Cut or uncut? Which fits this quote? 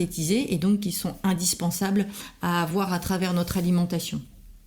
uncut